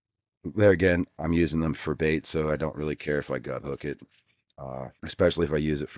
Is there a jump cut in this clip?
yes; 1 cut; at 5.0 s

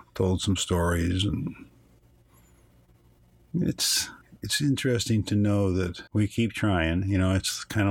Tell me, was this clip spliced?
yes; 2 cuts; at 4.2 s, 6.1 s

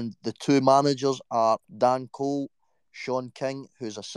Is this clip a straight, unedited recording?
no; 1 cut; at 1.7 s

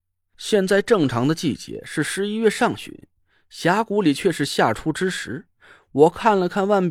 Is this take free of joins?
yes; 0 cuts

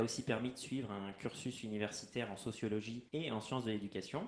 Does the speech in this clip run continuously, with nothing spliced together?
no; 1 cut; at 3.1 s

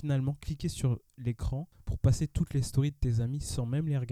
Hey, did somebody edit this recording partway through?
no; 0 cuts

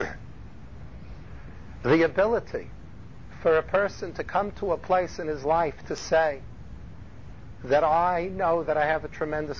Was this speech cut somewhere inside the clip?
no; 0 cuts

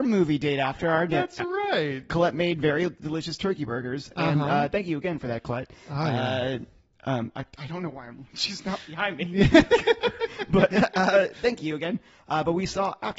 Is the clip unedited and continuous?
yes; 0 cuts

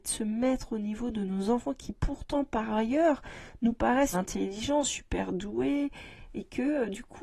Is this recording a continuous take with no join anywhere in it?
no; 1 cut; at 4.1 s

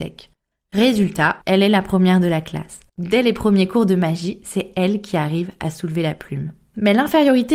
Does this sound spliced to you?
yes; 2 cuts; at 1.4 s, 2.9 s

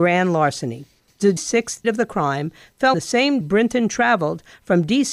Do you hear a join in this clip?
yes; 4 cuts; at 1.4 s, 1.8 s, 2.9 s, 3.4 s

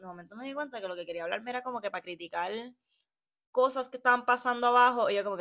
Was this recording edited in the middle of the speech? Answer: no; 0 cuts

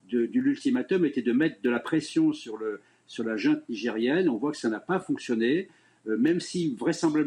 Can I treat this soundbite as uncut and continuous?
yes; 0 cuts

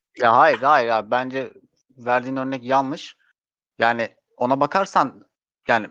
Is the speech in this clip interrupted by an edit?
no; 0 cuts

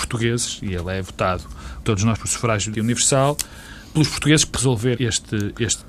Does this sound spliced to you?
yes; 5 cuts; at 1.8 s, 2.1 s, 2.7 s, 4.5 s, 5.0 s

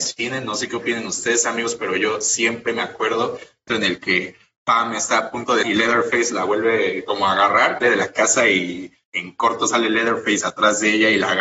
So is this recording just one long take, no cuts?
no; 3 cuts; at 3.7 s, 5.6 s, 7.8 s

